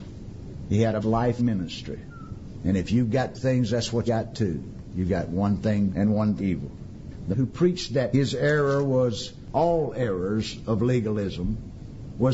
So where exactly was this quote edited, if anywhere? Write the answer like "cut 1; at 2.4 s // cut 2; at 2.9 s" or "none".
cut 1; at 1.0 s // cut 2; at 1.4 s // cut 3; at 3.3 s // cut 4; at 4.1 s // cut 5; at 5.9 s // cut 6; at 6.4 s // cut 7; at 7.3 s // cut 8; at 8.1 s // cut 9; at 9.5 s